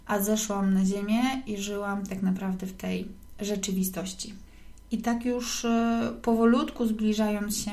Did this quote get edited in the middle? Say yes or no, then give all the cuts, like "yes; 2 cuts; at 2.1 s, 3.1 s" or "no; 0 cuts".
no; 0 cuts